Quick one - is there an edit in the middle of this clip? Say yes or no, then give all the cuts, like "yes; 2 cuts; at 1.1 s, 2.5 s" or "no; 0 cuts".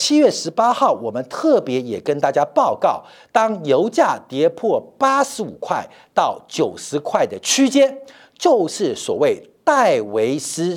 no; 0 cuts